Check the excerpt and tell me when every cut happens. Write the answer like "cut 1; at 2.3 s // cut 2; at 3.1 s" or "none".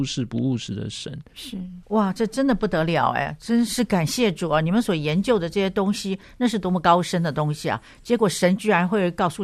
cut 1; at 1.8 s